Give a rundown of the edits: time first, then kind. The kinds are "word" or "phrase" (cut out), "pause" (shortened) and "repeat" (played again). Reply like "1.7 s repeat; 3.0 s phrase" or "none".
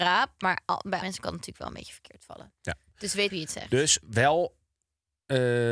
1.0 s word; 3.3 s word; 4.0 s pause